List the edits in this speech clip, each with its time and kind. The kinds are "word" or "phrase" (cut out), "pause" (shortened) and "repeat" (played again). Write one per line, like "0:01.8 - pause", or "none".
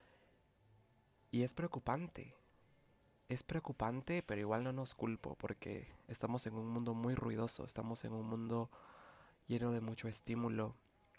none